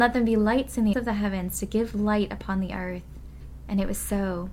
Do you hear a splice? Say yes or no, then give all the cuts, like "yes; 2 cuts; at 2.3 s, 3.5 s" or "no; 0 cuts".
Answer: yes; 1 cut; at 0.9 s